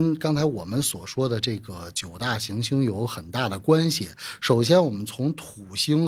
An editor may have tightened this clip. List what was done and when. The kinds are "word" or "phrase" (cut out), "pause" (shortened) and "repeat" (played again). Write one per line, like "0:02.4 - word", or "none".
none

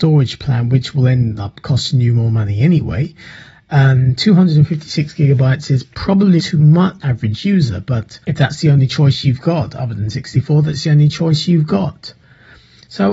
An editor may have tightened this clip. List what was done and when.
0:06.4 - word
0:07.0 - phrase
0:08.2 - pause

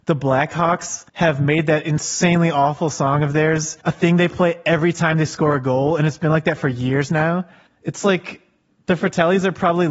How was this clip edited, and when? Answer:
0:01.1 - pause
0:03.8 - pause
0:07.7 - pause

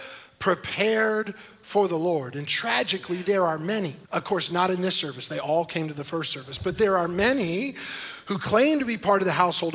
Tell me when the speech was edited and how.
0:04.0 - pause

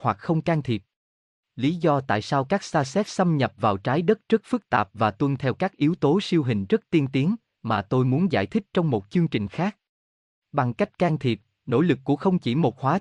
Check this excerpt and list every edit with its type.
none

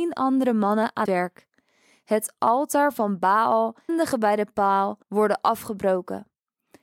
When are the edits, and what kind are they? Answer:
0:01.0 - word
0:03.9 - word
0:05.0 - pause

